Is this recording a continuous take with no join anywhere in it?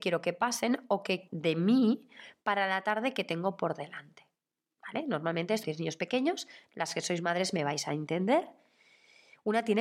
no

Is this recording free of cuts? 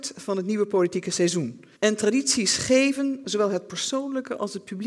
no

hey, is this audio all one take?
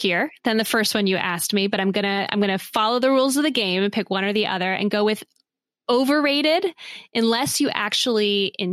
yes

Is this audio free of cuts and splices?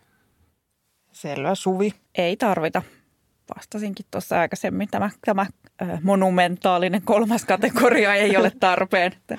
no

